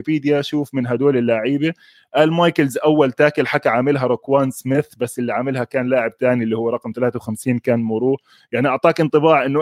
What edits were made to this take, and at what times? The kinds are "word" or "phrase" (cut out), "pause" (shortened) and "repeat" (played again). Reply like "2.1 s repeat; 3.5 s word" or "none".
none